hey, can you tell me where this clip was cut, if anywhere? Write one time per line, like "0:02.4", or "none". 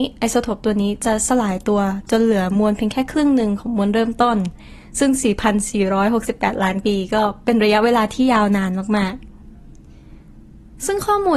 none